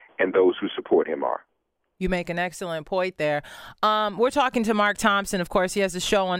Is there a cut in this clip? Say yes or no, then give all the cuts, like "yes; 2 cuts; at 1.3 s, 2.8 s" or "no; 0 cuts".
no; 0 cuts